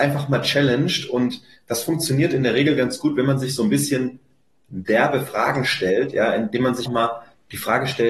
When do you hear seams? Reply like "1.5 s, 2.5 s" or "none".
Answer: 6.9 s